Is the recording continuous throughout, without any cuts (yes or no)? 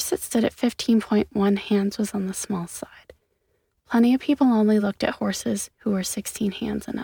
yes